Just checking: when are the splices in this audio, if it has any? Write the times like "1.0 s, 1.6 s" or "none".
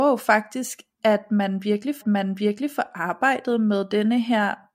0.9 s, 2.0 s